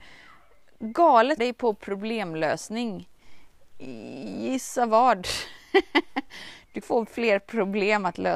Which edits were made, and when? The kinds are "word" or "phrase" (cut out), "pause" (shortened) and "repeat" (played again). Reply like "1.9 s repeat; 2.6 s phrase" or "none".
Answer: 1.4 s word; 6.8 s word